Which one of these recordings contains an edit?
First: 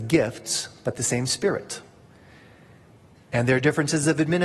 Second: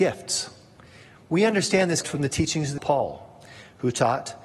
second; 2 cuts; at 2.0 s, 2.8 s

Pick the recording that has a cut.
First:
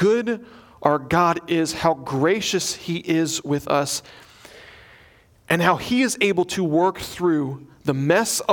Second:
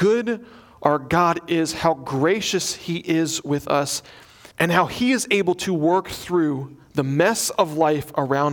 second; 1 cut; at 4.5 s

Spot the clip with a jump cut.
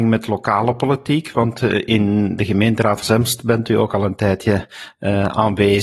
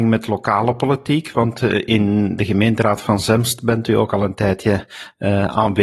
first; 1 cut; at 3.0 s

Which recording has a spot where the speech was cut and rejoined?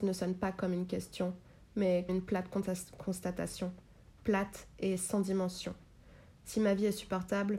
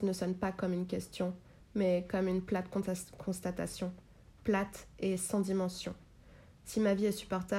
first; 1 cut; at 2.1 s

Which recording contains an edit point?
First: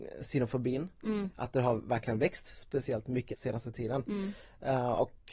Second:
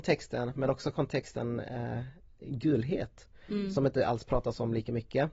first; 1 cut; at 3.3 s

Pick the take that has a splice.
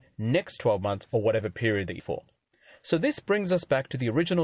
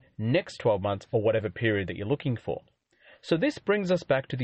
first; 1 cut; at 2.0 s

